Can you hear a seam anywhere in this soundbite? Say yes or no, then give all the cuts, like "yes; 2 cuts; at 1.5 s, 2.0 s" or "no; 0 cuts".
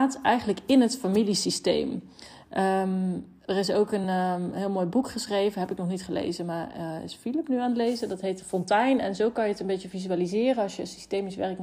no; 0 cuts